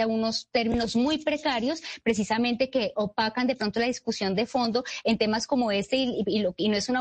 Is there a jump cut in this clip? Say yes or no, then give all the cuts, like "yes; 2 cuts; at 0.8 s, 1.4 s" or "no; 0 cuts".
no; 0 cuts